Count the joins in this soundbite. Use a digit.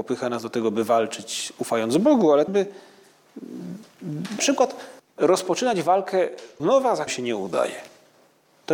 5